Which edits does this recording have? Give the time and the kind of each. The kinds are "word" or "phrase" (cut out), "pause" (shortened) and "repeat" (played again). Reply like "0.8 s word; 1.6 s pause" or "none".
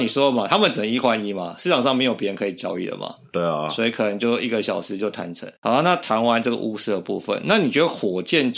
5.6 s pause